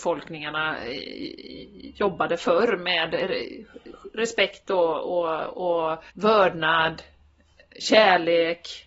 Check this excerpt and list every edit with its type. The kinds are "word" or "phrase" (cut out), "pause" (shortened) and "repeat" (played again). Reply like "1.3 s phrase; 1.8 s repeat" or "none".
6.1 s pause